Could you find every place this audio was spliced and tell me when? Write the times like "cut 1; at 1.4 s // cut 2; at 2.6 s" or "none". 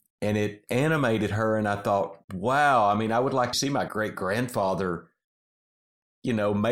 cut 1; at 2.2 s // cut 2; at 3.5 s // cut 3; at 3.9 s

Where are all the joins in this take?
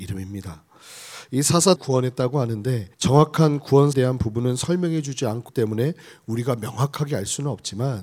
cut 1; at 1.8 s // cut 2; at 2.9 s // cut 3; at 3.9 s // cut 4; at 5.5 s

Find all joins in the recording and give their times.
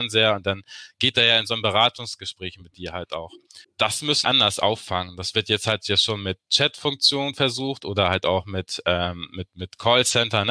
cut 1; at 3.6 s // cut 2; at 4.2 s

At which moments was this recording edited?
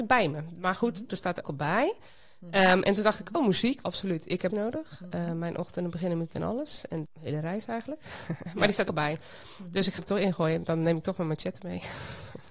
cut 1; at 1.1 s // cut 2; at 1.4 s // cut 3; at 3.8 s // cut 4; at 4.5 s // cut 5; at 6.3 s // cut 6; at 7.0 s // cut 7; at 8.9 s // cut 8; at 10.0 s

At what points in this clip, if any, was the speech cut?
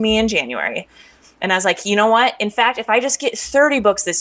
none

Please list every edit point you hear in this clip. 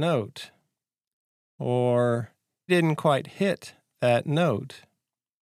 cut 1; at 2.7 s

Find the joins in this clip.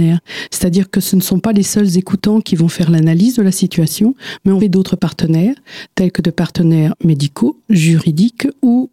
cut 1; at 4.6 s

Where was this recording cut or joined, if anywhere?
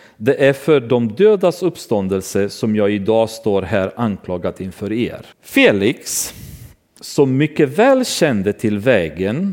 cut 1; at 5.3 s

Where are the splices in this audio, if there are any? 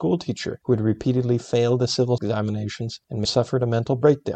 cut 1; at 2.2 s // cut 2; at 3.2 s

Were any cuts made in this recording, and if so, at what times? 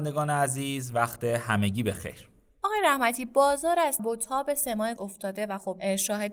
cut 1; at 4.0 s // cut 2; at 5.0 s

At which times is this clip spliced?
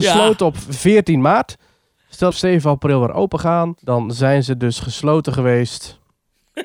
cut 1; at 2.3 s // cut 2; at 3.8 s

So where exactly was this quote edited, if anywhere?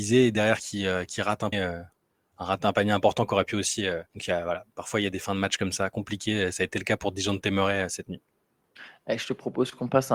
cut 1; at 1.5 s // cut 2; at 2.0 s // cut 3; at 4.1 s

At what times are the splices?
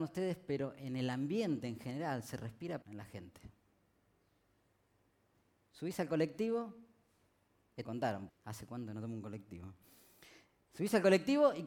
cut 1; at 2.8 s // cut 2; at 7.8 s // cut 3; at 8.3 s

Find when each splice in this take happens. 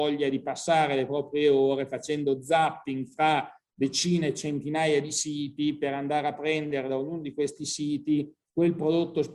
none

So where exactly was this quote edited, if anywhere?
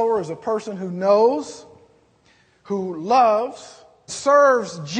cut 1; at 4.1 s

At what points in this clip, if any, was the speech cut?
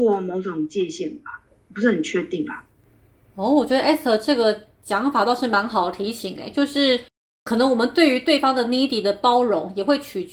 none

